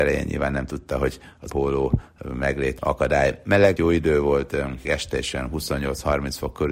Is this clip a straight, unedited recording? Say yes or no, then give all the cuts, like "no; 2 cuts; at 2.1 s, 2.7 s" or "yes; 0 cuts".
no; 4 cuts; at 1.5 s, 2.8 s, 3.8 s, 4.8 s